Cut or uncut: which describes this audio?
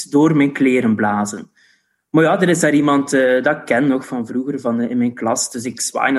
uncut